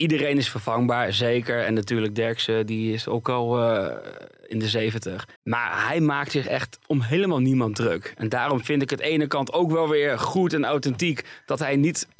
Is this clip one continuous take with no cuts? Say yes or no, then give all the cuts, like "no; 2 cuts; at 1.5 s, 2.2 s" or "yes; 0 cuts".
no; 1 cut; at 5.4 s